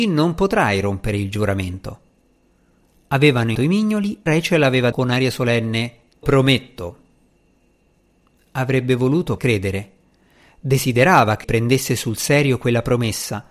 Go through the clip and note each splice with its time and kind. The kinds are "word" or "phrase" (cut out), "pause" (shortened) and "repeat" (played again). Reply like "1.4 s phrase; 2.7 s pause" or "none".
3.5 s word; 4.3 s word; 4.9 s word; 6.2 s word; 9.4 s word; 11.4 s word

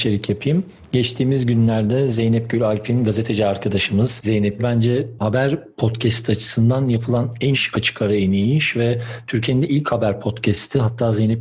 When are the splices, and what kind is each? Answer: 4.6 s phrase; 7.5 s word

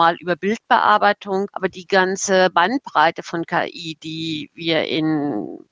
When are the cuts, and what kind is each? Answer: none

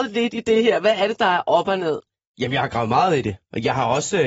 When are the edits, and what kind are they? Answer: none

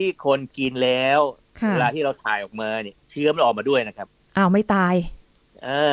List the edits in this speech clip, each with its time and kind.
none

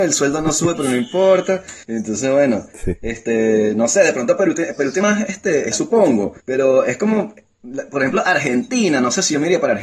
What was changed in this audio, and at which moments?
1.8 s pause; 5.0 s word; 5.7 s word; 6.4 s pause

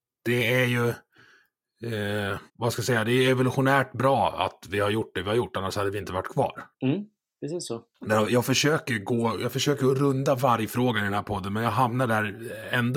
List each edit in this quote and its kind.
2.5 s pause; 6.7 s pause; 7.9 s pause

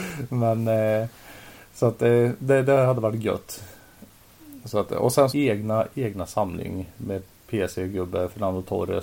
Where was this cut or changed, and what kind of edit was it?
5.3 s phrase

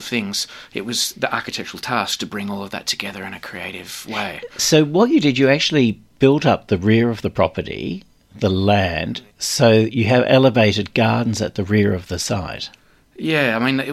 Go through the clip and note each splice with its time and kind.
none

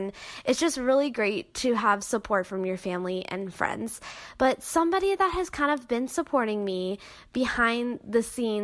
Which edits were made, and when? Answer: none

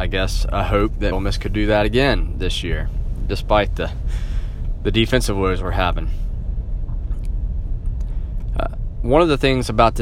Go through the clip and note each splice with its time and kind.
1.1 s word

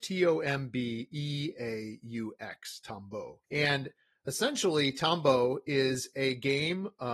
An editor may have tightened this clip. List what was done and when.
3.4 s pause

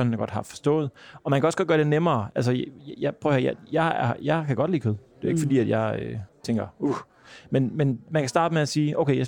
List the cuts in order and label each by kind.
6.3 s pause

